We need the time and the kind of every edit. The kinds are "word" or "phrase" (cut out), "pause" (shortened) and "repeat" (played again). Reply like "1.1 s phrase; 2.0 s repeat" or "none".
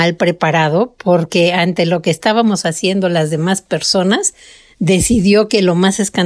none